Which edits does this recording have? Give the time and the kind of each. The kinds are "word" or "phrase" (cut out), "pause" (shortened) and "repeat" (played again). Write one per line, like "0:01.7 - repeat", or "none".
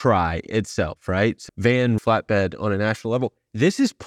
0:01.5 - word
0:02.0 - word